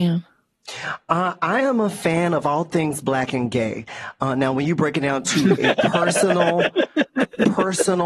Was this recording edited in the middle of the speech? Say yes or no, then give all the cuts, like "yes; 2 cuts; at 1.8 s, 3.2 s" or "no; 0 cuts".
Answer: no; 0 cuts